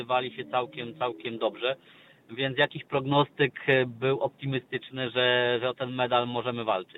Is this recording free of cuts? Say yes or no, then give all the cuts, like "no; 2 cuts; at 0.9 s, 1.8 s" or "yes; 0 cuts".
yes; 0 cuts